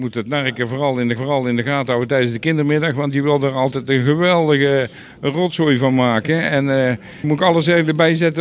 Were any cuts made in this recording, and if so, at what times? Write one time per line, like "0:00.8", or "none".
0:01.2
0:07.2